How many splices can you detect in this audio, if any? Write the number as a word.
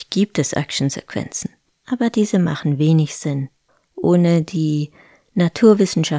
zero